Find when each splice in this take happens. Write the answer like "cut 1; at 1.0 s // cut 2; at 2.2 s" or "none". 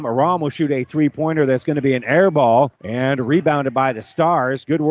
cut 1; at 2.7 s